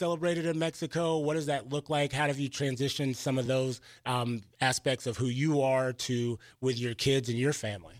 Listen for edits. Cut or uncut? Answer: uncut